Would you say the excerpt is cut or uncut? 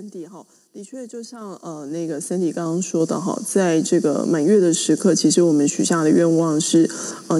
uncut